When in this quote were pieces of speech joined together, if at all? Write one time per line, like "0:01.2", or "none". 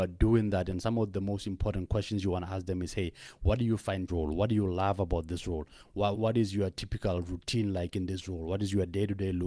0:04.1
0:06.1